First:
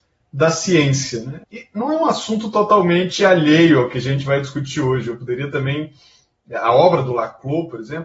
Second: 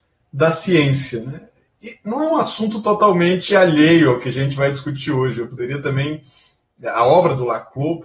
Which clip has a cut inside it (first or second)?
first